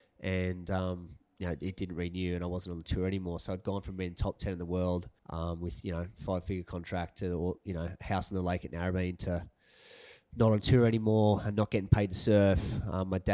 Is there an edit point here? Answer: yes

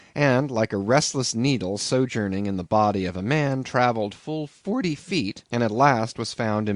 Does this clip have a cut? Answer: yes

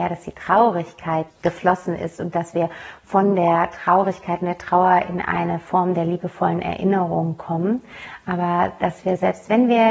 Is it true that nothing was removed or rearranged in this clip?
no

